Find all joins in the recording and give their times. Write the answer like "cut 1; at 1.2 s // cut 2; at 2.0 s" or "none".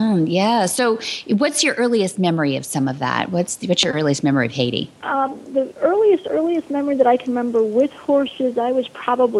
none

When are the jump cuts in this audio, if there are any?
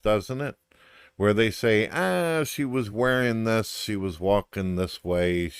none

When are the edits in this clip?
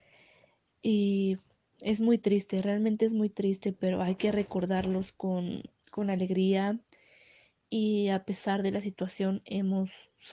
none

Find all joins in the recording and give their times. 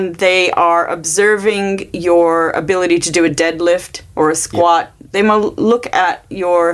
none

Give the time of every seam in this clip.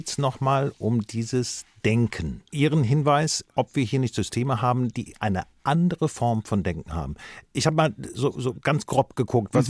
cut 1; at 2.5 s

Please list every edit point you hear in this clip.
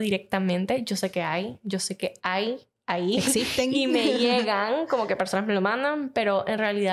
none

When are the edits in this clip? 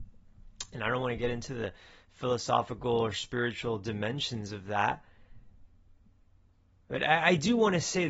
none

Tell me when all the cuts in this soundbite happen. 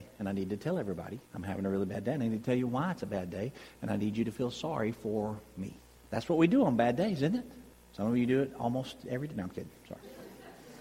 cut 1; at 1.2 s // cut 2; at 5.8 s // cut 3; at 7.7 s

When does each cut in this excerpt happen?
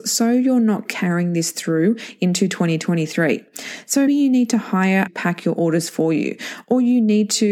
cut 1; at 4.1 s // cut 2; at 5.1 s

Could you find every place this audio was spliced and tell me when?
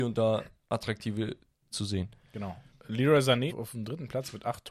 cut 1; at 1.7 s // cut 2; at 3.5 s

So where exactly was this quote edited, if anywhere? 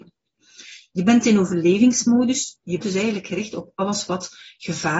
cut 1; at 2.8 s

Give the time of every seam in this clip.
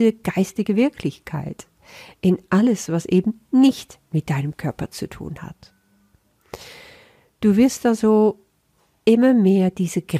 none

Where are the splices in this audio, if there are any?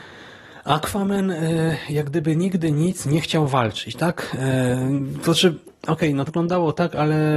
cut 1; at 6.3 s

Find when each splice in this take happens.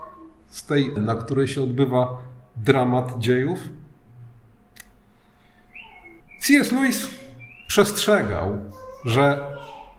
cut 1; at 1.0 s // cut 2; at 6.2 s

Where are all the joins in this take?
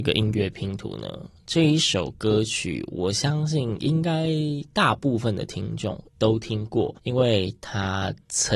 cut 1; at 6.1 s // cut 2; at 7.0 s

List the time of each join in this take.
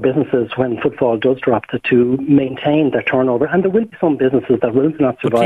none

